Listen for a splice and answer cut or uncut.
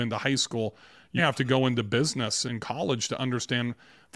cut